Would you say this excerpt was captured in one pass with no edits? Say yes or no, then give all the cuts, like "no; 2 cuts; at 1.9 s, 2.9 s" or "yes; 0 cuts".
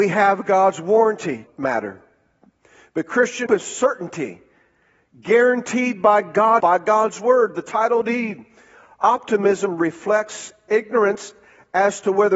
no; 3 cuts; at 1.5 s, 3.5 s, 6.6 s